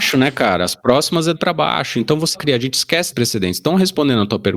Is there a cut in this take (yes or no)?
yes